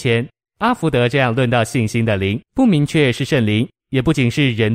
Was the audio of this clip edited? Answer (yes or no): yes